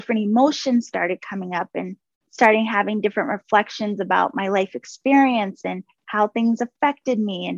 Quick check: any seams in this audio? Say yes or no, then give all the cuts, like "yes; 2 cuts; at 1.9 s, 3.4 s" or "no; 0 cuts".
no; 0 cuts